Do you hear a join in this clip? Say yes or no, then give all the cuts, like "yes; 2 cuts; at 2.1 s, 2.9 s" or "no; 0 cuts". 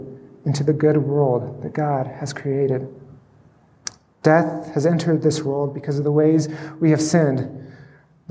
no; 0 cuts